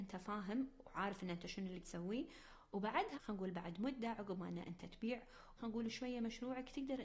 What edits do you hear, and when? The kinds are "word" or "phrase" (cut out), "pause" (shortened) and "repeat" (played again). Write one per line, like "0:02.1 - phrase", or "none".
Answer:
0:01.8 - word
0:03.1 - word
0:05.6 - word